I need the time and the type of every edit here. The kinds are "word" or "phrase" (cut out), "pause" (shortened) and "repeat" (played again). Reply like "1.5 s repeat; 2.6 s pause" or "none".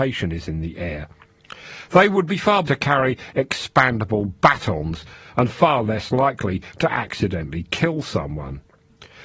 2.7 s word